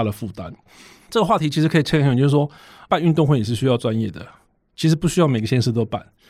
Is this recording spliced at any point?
no; 0 cuts

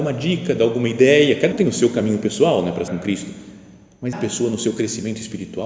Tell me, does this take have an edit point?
yes; 3 cuts; at 1.5 s, 2.9 s, 4.1 s

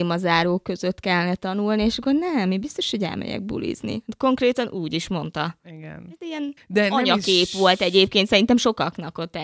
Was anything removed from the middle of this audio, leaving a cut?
yes; 1 cut; at 6.6 s

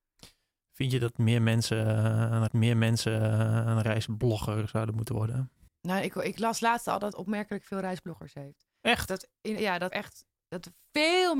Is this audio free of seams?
no; 5 cuts; at 2.5 s, 5.7 s, 7.1 s, 9.6 s, 9.9 s

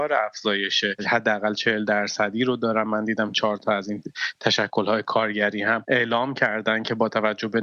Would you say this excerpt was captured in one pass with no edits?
yes; 0 cuts

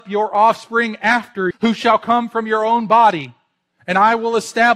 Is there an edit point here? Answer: yes; 1 cut; at 1.5 s

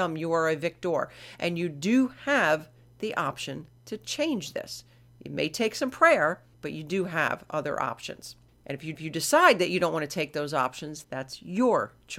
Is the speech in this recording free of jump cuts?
no; 4 cuts; at 6.5 s, 8.5 s, 8.9 s, 11.0 s

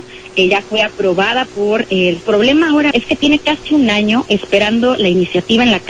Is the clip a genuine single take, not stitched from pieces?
no; 2 cuts; at 2.2 s, 2.9 s

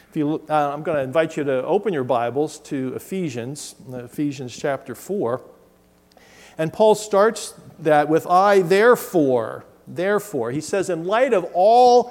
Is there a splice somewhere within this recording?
no; 0 cuts

